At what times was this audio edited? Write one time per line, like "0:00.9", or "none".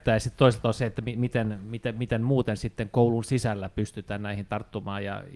none